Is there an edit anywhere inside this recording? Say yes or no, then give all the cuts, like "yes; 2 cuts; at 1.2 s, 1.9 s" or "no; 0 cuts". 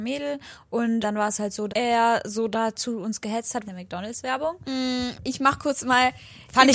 yes; 4 cuts; at 1.0 s, 1.7 s, 3.6 s, 5.1 s